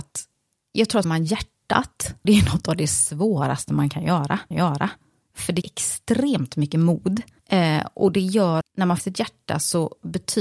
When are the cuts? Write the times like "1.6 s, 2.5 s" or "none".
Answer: 1.0 s, 2.2 s, 4.5 s, 5.6 s, 8.6 s, 9.0 s

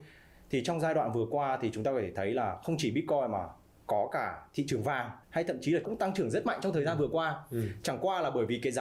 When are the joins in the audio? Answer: 5.2 s, 5.8 s

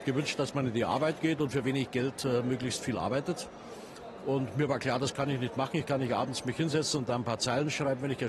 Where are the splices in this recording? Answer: none

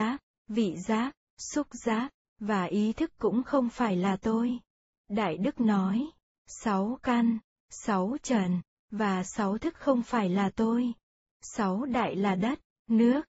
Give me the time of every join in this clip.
none

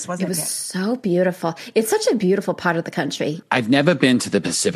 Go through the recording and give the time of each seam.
none

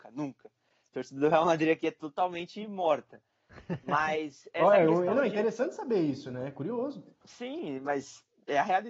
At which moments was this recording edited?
7.1 s

